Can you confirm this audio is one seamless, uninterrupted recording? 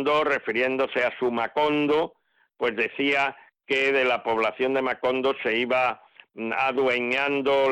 yes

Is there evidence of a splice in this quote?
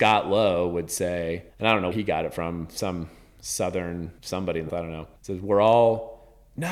yes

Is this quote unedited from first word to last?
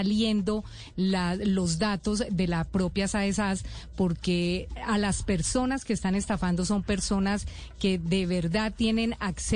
yes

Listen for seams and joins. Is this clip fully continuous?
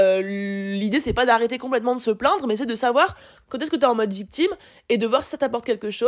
yes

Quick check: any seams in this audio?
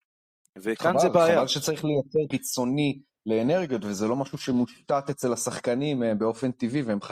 yes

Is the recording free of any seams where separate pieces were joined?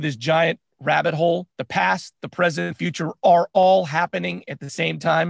no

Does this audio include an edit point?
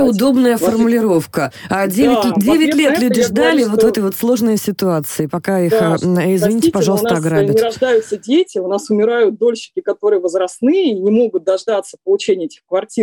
no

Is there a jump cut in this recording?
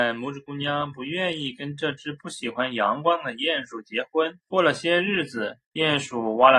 yes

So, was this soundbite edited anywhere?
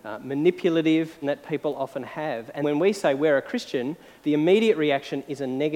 yes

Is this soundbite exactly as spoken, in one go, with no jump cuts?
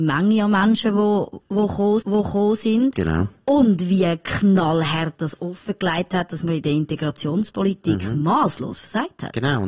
no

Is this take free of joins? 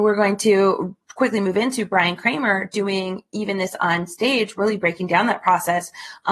yes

